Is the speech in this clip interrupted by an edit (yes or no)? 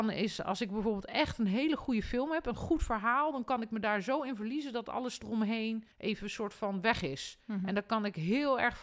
yes